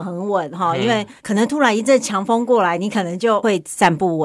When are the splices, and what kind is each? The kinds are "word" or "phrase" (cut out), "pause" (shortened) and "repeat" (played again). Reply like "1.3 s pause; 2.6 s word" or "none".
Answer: 1.2 s pause